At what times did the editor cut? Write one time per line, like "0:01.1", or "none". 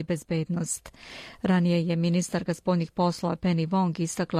none